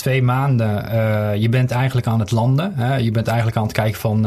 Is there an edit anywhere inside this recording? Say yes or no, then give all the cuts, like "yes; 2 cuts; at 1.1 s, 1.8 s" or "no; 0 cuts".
no; 0 cuts